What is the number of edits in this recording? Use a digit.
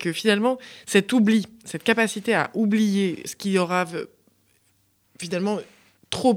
1